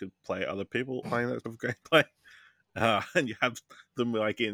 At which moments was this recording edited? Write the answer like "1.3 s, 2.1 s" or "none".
1.0 s, 1.4 s

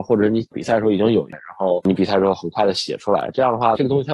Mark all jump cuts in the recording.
1.3 s

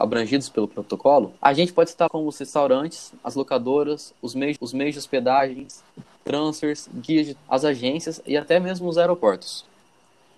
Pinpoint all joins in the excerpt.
1.4 s, 2.1 s, 4.6 s, 7.4 s

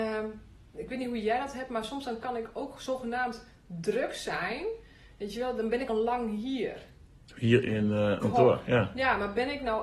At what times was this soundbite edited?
5.9 s, 7.2 s, 8.2 s

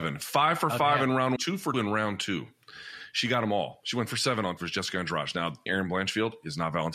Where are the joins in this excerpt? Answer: 1.4 s, 1.7 s, 4.1 s, 4.6 s, 5.7 s

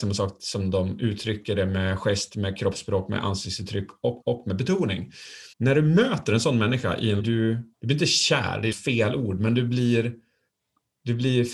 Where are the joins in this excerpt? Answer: 4.2 s, 5.5 s, 7.2 s, 7.7 s, 8.7 s

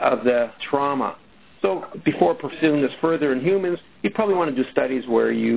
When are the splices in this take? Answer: none

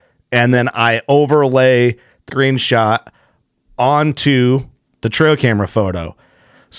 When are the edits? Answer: 2.3 s

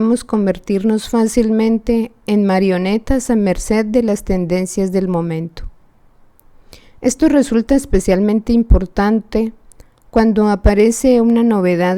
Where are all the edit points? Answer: none

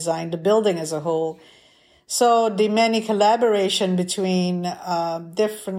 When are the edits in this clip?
none

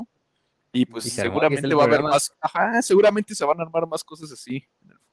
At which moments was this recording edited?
none

